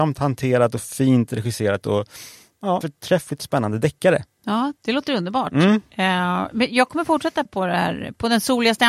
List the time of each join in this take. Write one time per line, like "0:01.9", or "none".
0:02.8
0:04.8
0:07.5